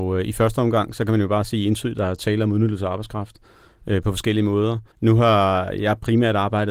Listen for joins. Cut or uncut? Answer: cut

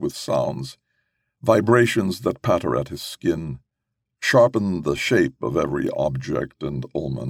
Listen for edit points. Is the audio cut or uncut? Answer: uncut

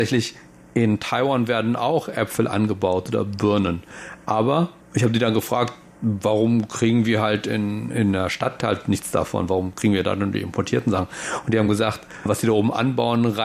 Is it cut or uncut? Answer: uncut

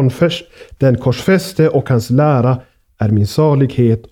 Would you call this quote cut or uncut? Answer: uncut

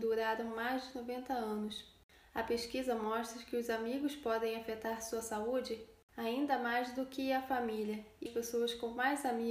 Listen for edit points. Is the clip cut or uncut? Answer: cut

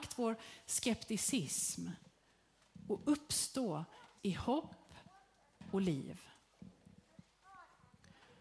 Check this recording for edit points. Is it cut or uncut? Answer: cut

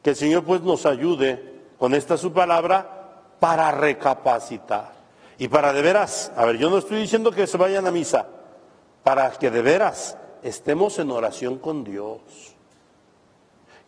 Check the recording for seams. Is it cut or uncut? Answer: cut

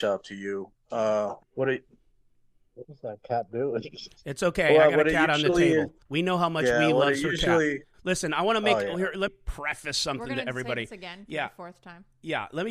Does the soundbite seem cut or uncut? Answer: cut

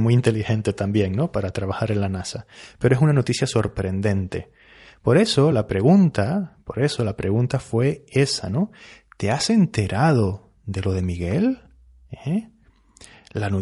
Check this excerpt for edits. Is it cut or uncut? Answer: uncut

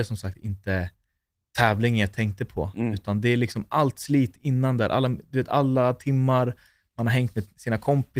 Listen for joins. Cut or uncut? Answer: uncut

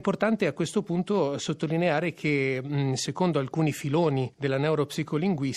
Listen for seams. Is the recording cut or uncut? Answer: uncut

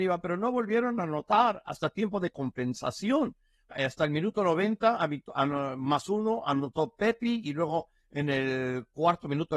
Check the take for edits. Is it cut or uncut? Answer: cut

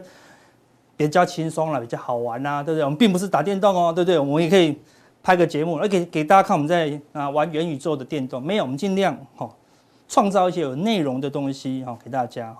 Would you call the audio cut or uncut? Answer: uncut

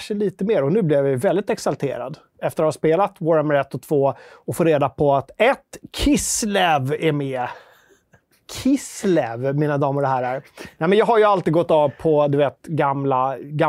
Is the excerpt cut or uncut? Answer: uncut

